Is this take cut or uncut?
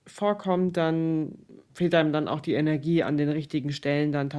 uncut